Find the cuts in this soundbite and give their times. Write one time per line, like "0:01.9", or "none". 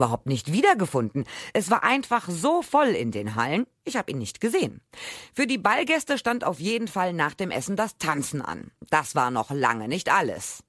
none

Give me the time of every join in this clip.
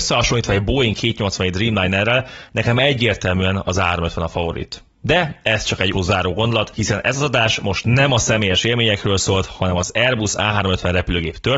0:05.9

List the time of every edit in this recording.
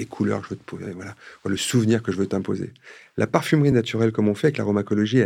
none

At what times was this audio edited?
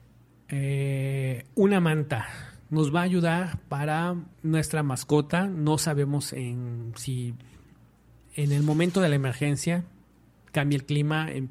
0:04.3

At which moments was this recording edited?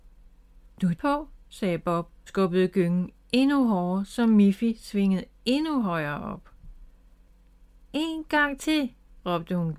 0:01.0
0:02.3

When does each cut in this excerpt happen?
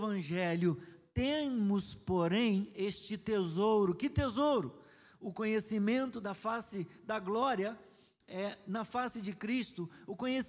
none

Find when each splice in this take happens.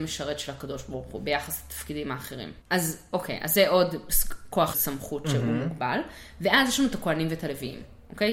0:04.7

